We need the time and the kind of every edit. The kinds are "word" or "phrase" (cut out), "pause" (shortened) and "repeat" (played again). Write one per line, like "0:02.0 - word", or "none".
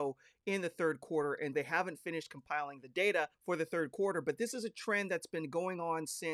0:01.5 - word
0:03.3 - pause

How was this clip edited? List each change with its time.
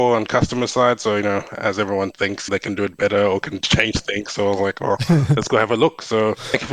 none

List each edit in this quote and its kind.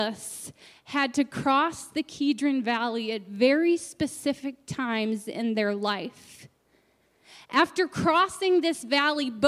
none

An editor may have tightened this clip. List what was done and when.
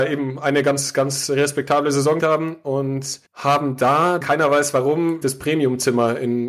0:02.2 - word
0:03.2 - pause
0:04.2 - word
0:05.2 - word

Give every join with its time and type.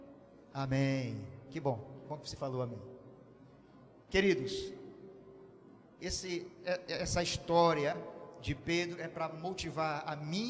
none

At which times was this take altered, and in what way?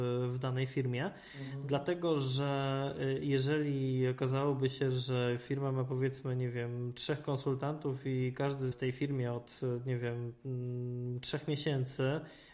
0:08.7 - phrase

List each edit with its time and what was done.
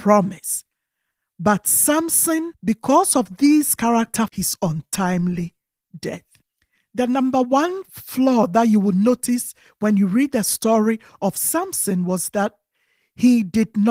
0:02.5 - pause
0:04.3 - phrase
0:06.4 - pause

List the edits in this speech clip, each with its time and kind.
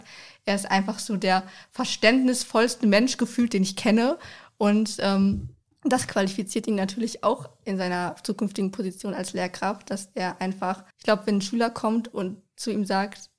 0:05.6 - pause
0:10.9 - pause

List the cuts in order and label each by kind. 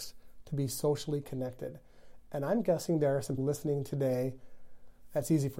0:03.4 - word

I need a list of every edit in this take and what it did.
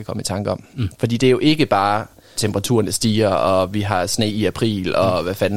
0:02.4 - word

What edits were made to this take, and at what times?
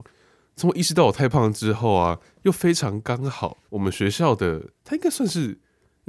0:03.7 - pause
0:04.8 - pause

